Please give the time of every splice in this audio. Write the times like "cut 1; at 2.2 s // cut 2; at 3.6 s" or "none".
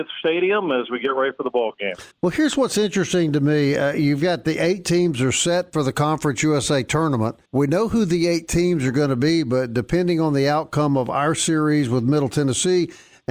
cut 1; at 2.1 s // cut 2; at 7.5 s